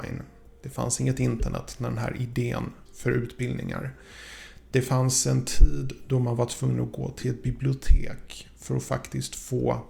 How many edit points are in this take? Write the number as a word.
one